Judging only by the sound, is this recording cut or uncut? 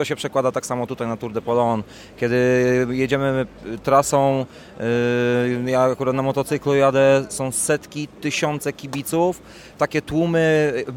uncut